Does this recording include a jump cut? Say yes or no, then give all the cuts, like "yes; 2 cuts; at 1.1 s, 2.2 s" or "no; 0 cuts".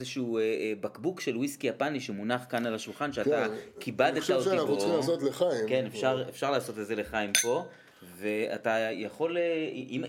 no; 0 cuts